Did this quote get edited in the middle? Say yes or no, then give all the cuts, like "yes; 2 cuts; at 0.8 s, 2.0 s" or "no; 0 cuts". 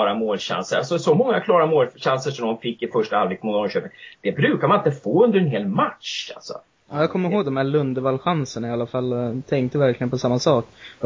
no; 0 cuts